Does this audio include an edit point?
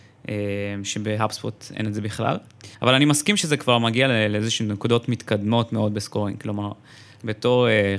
yes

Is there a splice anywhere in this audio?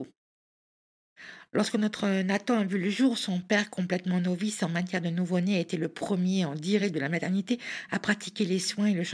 no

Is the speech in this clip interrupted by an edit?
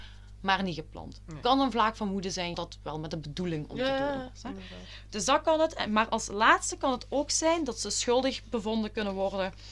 yes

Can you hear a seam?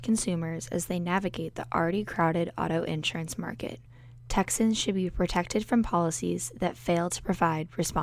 no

